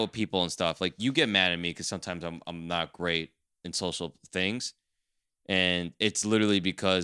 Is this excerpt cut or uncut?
uncut